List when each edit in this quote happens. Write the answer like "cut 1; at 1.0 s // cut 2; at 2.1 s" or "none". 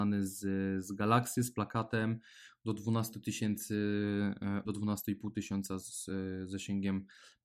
cut 1; at 4.6 s